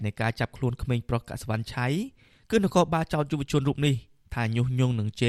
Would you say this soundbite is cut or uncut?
uncut